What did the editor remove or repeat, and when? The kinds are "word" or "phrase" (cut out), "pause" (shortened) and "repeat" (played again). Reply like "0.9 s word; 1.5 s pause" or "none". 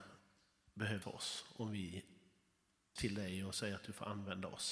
1.0 s word; 3.0 s phrase